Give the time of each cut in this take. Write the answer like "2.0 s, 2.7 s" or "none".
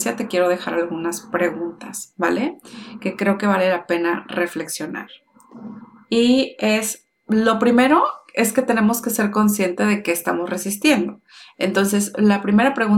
none